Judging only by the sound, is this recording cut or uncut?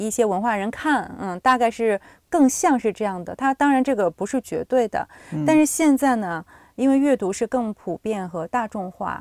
uncut